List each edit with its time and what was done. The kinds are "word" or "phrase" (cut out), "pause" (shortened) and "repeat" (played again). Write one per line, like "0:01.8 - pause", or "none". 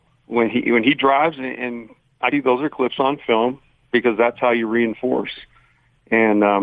0:02.3 - word